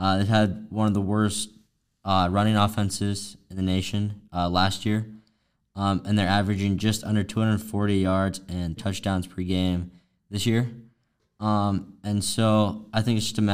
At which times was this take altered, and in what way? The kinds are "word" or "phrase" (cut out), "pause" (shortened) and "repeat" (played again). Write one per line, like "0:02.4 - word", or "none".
0:08.8 - word